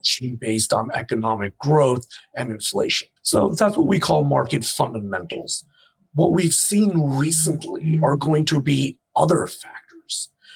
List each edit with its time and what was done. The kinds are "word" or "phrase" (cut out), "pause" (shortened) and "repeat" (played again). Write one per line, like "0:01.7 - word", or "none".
0:03.2 - pause

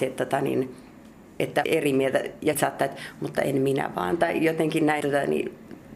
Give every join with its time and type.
0:01.6 - word
0:02.5 - word
0:05.0 - word

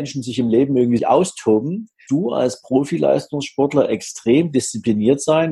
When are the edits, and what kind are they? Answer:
0:01.0 - word
0:02.1 - word

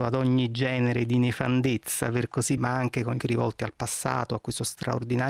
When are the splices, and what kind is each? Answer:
0:02.6 - word
0:03.2 - word

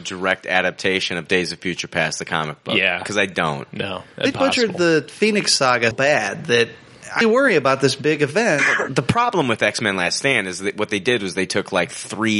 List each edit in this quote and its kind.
0:04.3 - word
0:05.9 - word
0:07.2 - word

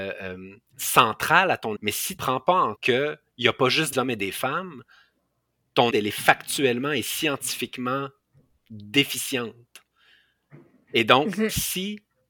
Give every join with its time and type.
0:01.8 - word
0:02.2 - word
0:02.8 - word
0:03.9 - word
0:05.9 - word

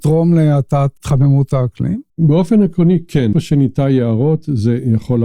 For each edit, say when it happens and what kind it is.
0:02.1 - pause
0:03.3 - word

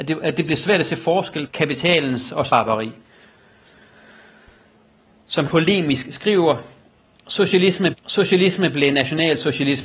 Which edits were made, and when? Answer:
0:01.5 - word
0:02.5 - word
0:05.5 - word
0:07.9 - repeat

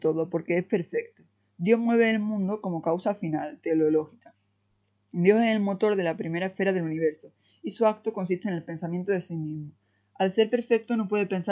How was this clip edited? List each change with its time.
none

